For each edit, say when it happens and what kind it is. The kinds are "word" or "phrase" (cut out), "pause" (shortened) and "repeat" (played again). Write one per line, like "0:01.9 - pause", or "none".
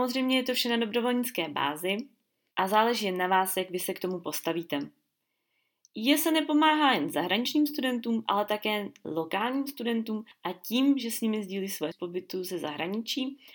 0:11.9 - phrase